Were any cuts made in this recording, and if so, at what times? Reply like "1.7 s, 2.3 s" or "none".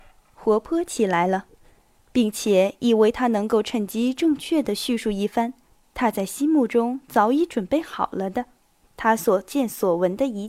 none